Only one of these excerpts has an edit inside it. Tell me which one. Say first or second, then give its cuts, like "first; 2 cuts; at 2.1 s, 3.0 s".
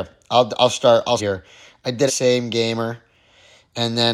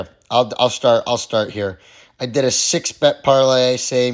first; 2 cuts; at 1.2 s, 2.1 s